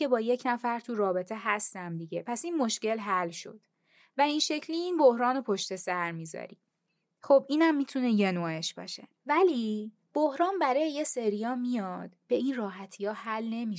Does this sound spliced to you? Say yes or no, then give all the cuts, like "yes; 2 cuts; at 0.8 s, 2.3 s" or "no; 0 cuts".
no; 0 cuts